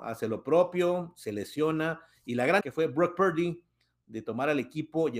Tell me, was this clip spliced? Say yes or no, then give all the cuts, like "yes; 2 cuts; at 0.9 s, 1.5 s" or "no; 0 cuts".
yes; 1 cut; at 2.6 s